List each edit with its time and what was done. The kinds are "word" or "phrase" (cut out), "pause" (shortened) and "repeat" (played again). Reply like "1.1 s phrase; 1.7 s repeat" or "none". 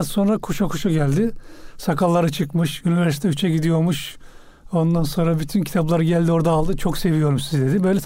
none